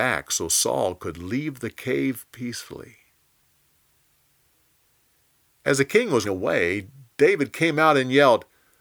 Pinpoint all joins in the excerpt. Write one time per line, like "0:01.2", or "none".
0:06.2